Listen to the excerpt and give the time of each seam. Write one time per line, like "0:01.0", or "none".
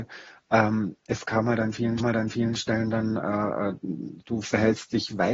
0:02.0
0:04.2